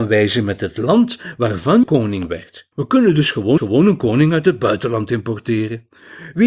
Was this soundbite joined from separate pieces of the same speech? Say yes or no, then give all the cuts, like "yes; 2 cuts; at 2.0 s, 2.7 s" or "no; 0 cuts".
yes; 3 cuts; at 1.8 s, 2.7 s, 3.6 s